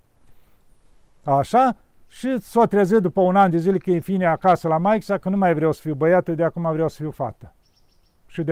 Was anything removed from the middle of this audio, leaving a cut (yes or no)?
no